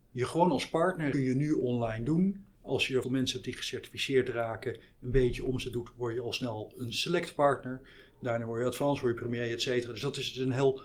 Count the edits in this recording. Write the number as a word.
three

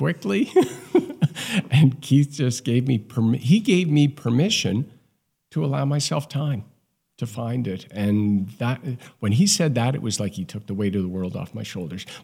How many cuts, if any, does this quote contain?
zero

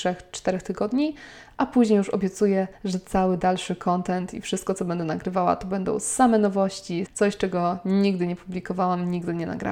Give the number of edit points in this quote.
two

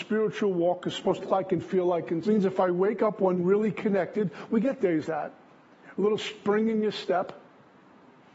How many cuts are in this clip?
four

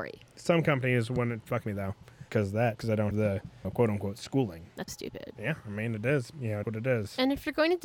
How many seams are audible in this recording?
eight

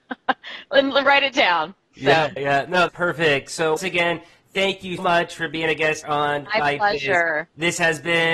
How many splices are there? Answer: six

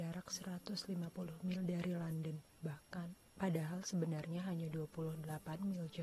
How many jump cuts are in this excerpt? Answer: one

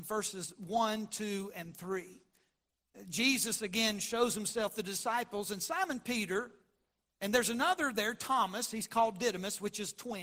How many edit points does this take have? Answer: zero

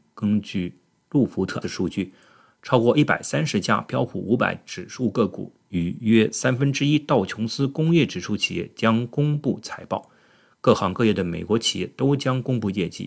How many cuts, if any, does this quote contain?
one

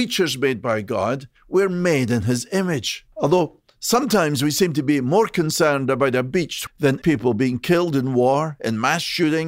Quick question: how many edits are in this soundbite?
four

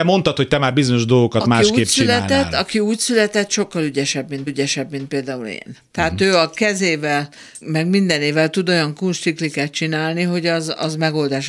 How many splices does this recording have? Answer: three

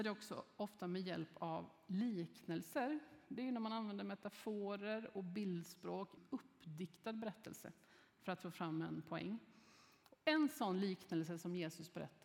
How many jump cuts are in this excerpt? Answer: one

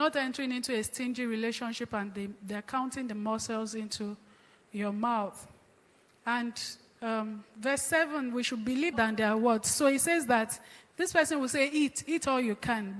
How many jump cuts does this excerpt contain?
one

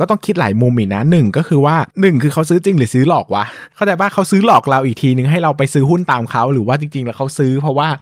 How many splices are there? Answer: one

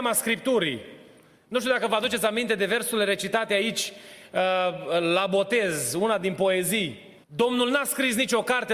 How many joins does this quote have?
one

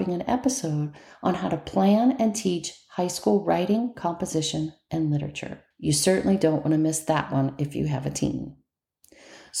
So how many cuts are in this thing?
one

